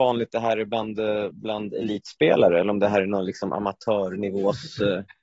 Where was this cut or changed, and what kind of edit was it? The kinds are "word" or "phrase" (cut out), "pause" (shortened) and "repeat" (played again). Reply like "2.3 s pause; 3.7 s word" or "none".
none